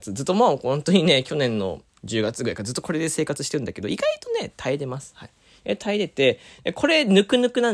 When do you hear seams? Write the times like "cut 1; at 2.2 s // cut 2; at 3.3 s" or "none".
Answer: none